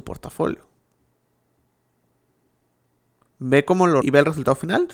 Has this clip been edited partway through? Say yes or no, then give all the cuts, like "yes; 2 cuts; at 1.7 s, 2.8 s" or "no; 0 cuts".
yes; 1 cut; at 4.0 s